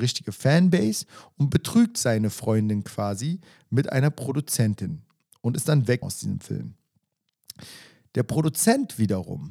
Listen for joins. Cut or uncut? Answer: cut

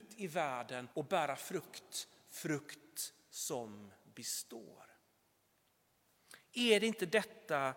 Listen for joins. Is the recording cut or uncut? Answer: cut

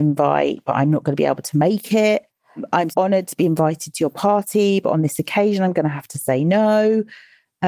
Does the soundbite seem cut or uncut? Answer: cut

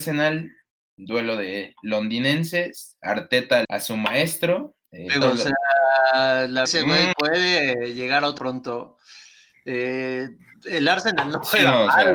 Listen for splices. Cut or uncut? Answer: cut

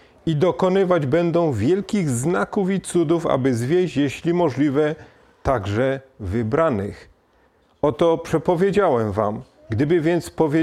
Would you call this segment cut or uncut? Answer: uncut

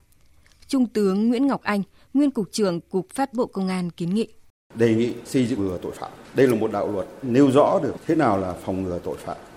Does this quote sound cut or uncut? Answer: cut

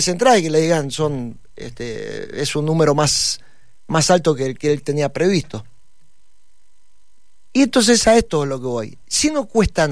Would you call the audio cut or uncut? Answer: uncut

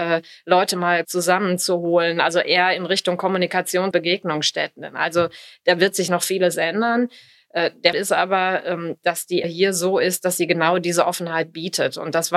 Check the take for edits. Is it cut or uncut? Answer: cut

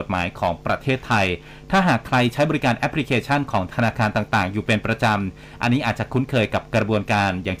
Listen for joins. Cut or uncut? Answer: uncut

